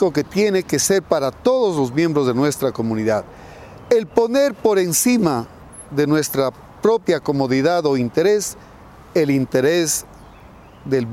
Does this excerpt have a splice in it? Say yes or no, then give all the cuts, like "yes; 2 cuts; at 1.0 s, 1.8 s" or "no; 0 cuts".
no; 0 cuts